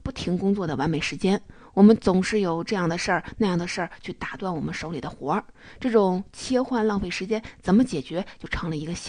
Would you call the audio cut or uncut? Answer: uncut